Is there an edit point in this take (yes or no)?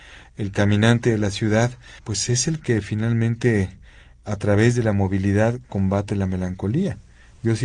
yes